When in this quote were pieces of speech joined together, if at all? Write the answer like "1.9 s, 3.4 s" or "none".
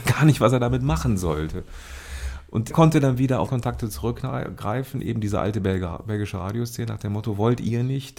2.7 s, 3.5 s

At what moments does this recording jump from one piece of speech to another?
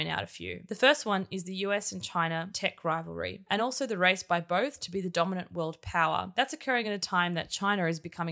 none

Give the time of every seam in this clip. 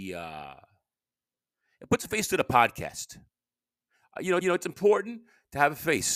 4.4 s

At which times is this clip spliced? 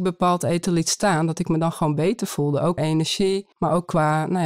2.8 s, 3.5 s

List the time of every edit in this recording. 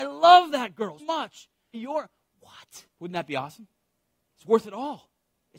1.0 s, 1.7 s, 2.9 s

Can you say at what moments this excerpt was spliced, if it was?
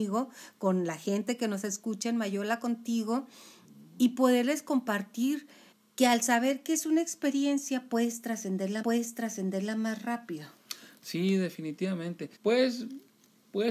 5.7 s, 8.8 s, 12.4 s

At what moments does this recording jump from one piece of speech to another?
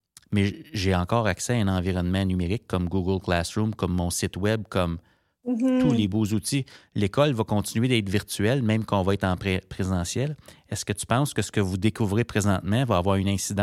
none

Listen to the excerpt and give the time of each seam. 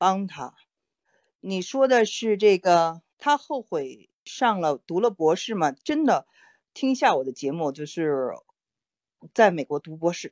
3.1 s

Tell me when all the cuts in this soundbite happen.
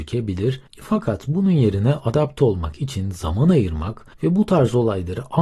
4.1 s

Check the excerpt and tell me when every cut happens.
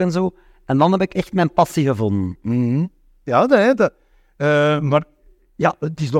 none

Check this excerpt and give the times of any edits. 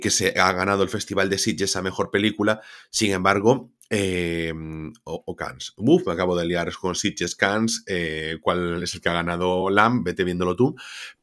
none

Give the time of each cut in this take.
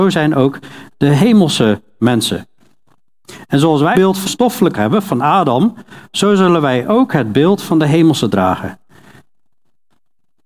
3.9 s, 4.3 s, 4.7 s

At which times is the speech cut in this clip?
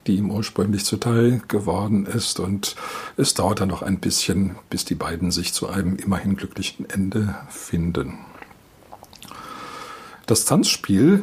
none

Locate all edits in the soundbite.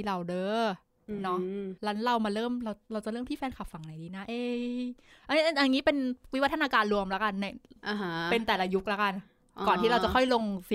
1.8 s

